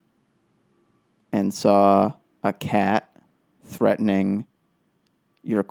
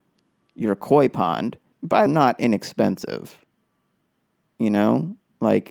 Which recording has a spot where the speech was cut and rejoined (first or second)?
second